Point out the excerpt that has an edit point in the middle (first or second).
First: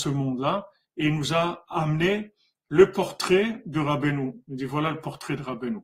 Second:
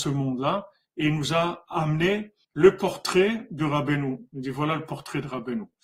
second